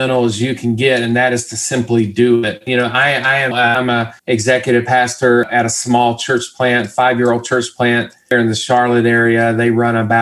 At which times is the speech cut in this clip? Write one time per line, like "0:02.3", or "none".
0:03.5
0:04.2